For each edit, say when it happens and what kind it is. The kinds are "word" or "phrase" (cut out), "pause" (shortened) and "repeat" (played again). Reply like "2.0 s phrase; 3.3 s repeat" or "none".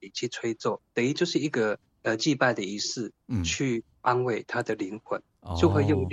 1.9 s pause